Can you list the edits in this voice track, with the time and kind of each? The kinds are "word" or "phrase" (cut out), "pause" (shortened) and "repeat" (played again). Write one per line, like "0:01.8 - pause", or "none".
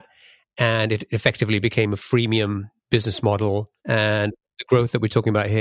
0:03.8 - pause